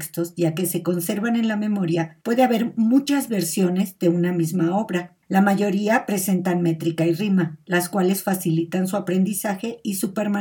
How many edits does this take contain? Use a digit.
2